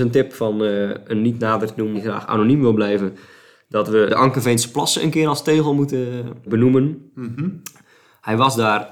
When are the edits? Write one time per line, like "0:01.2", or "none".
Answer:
0:01.9
0:04.1
0:06.5